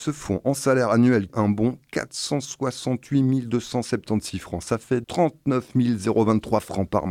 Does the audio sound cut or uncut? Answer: cut